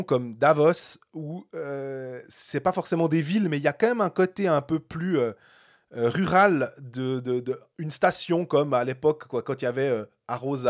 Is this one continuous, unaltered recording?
yes; 0 cuts

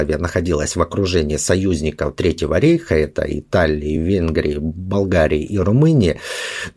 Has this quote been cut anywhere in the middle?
no; 0 cuts

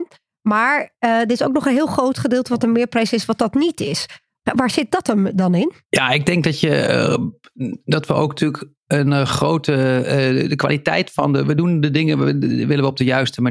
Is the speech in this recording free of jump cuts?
yes; 0 cuts

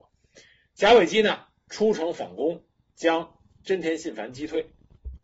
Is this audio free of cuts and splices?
yes; 0 cuts

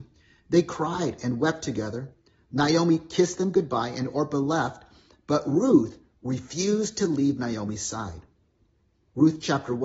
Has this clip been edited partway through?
no; 0 cuts

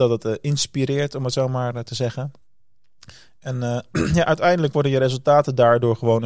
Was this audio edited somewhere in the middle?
no; 0 cuts

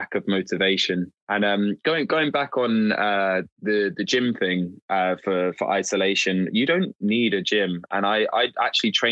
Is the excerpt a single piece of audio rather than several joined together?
no; 1 cut; at 1.2 s

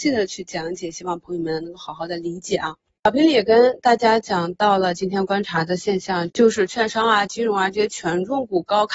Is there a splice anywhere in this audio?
no; 0 cuts

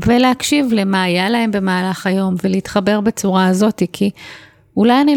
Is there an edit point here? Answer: no; 0 cuts

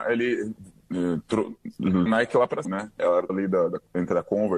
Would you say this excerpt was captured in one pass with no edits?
no; 3 cuts; at 2.1 s, 2.6 s, 3.3 s

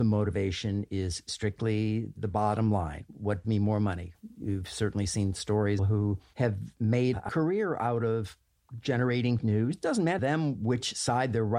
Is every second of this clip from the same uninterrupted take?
no; 5 cuts; at 3.4 s, 5.8 s, 7.3 s, 9.4 s, 10.2 s

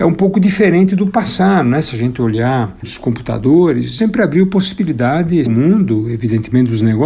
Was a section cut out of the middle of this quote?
yes; 3 cuts; at 2.8 s, 4.0 s, 5.5 s

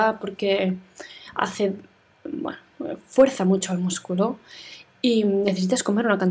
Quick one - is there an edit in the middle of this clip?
no; 0 cuts

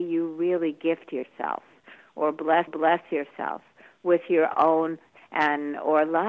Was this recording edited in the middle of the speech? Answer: yes; 2 cuts; at 2.7 s, 5.2 s

